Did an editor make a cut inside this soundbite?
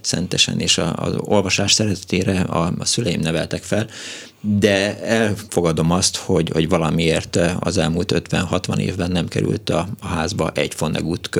no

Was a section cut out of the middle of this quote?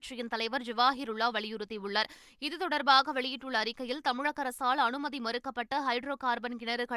no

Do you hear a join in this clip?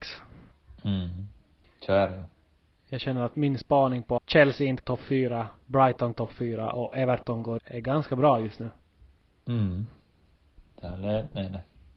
yes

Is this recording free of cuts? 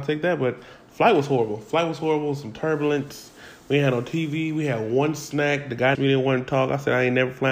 no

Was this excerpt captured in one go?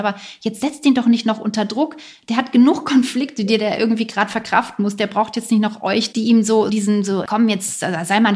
no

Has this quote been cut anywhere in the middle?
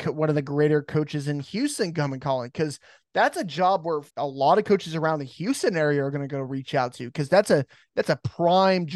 yes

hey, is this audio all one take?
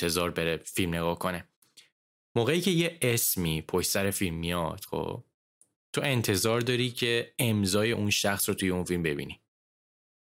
yes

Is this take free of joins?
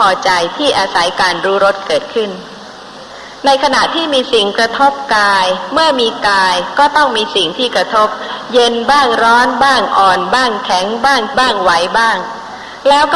no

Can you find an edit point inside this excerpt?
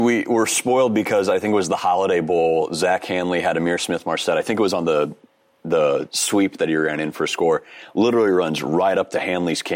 no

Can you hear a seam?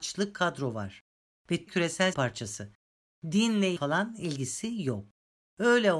yes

